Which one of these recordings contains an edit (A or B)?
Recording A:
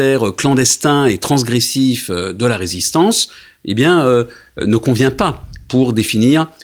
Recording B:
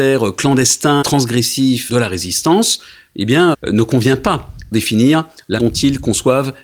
B